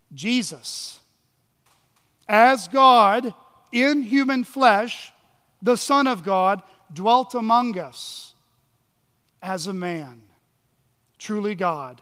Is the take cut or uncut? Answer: uncut